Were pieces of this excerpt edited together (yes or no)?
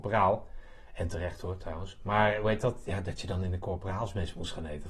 no